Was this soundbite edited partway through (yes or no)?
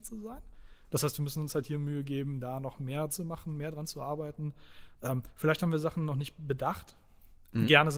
yes